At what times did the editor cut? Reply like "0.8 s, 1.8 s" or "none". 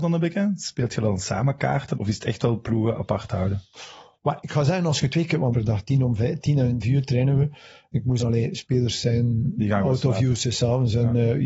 1.9 s, 5.5 s, 6.8 s, 8.2 s